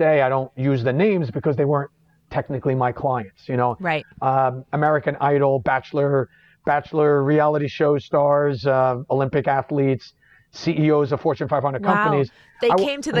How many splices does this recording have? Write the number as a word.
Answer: zero